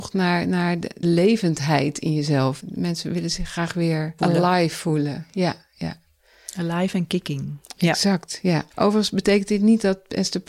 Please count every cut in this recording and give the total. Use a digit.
3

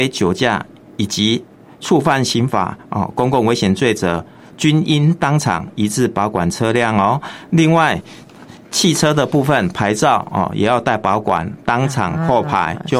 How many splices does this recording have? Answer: 0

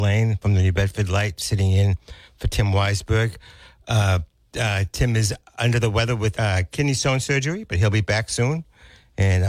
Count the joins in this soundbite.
1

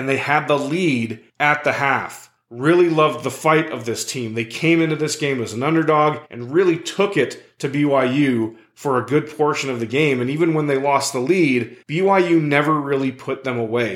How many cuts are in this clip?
2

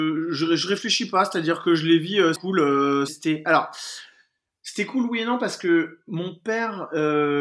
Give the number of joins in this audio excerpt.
2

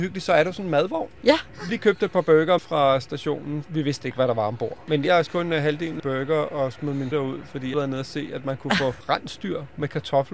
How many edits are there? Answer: 7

